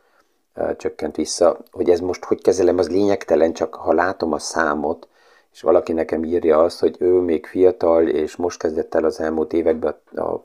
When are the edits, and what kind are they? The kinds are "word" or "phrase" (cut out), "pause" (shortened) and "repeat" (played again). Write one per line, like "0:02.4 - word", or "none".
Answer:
none